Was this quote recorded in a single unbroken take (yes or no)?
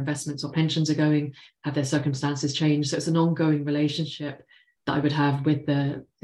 yes